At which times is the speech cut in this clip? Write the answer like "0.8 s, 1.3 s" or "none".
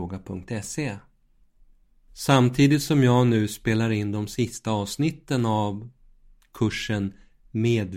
none